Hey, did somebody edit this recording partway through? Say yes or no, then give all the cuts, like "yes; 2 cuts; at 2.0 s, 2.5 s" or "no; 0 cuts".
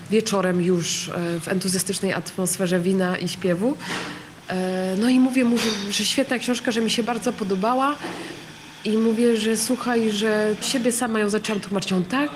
yes; 1 cut; at 10.6 s